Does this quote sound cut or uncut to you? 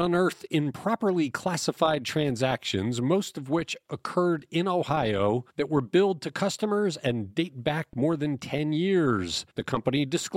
uncut